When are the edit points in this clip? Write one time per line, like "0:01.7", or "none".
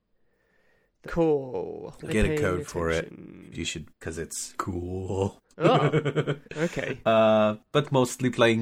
0:01.0
0:02.1
0:03.5
0:03.9
0:04.6
0:05.5
0:06.5